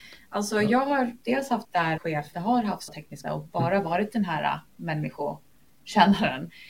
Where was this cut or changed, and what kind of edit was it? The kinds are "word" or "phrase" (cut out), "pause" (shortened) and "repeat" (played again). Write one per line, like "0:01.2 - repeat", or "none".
0:01.6 - word
0:02.0 - word
0:02.3 - word
0:02.9 - word
0:03.2 - word